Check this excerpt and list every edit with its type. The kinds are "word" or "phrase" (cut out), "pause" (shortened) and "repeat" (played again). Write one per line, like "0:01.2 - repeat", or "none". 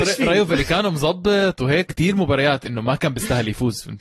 0:01.9 - phrase